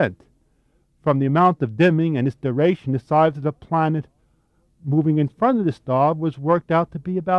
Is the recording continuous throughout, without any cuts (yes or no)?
yes